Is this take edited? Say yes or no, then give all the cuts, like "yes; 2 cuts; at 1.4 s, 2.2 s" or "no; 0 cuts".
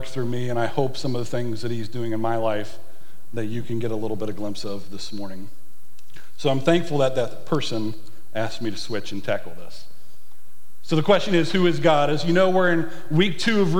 no; 0 cuts